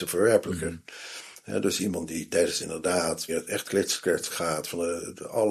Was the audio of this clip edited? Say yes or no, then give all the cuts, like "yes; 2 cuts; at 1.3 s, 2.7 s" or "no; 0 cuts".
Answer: yes; 4 cuts; at 2.6 s, 3.3 s, 3.6 s, 4.3 s